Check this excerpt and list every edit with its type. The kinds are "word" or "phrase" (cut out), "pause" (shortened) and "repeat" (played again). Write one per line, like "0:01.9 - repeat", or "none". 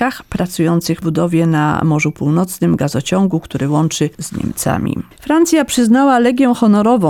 0:01.0 - word
0:04.1 - word
0:05.1 - pause